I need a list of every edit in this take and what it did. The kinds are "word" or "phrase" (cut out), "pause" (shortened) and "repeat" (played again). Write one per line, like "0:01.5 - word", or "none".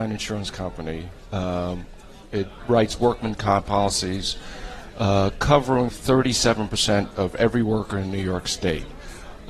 0:02.6 - word
0:03.7 - word
0:05.9 - word